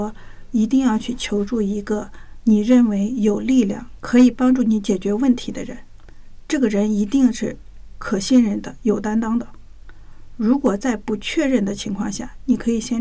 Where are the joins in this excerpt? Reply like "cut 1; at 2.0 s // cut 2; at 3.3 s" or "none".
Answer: cut 1; at 4.0 s